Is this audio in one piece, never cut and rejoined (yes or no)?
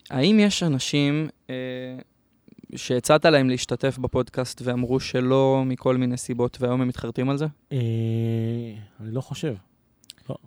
no